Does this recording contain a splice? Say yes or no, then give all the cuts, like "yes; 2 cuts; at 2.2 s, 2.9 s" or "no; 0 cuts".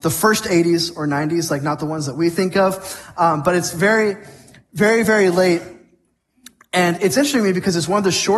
no; 0 cuts